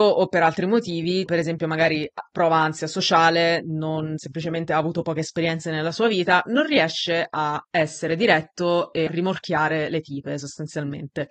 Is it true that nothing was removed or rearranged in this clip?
no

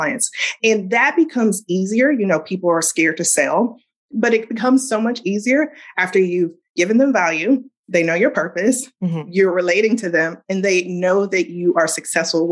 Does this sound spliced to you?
no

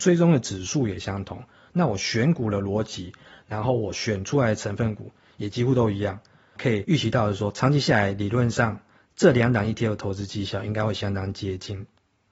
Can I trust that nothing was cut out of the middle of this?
yes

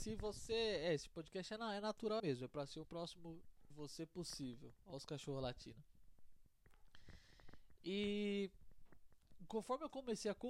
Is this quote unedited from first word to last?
no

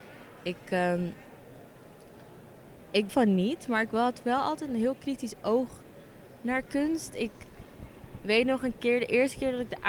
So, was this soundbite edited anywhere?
yes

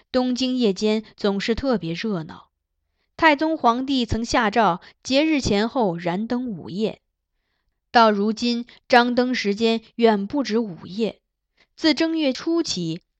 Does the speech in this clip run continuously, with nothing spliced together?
yes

